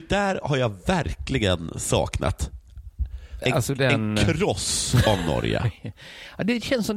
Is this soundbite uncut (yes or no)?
no